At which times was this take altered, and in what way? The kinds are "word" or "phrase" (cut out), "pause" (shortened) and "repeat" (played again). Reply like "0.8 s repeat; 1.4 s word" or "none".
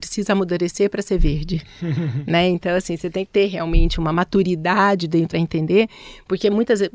3.3 s phrase; 5.3 s phrase